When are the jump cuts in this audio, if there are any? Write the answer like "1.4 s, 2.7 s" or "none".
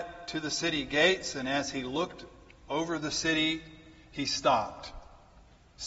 none